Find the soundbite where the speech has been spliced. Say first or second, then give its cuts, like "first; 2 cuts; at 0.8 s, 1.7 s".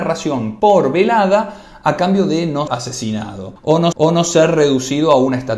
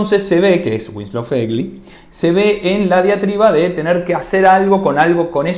first; 2 cuts; at 2.7 s, 3.9 s